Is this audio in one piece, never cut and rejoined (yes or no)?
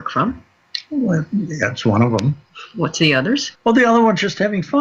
no